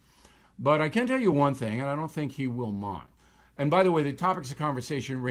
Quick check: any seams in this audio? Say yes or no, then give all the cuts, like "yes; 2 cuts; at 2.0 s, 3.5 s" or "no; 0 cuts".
no; 0 cuts